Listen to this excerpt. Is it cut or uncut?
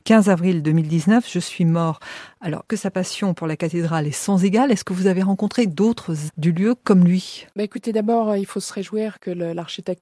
cut